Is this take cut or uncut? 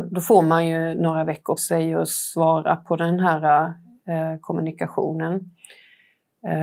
cut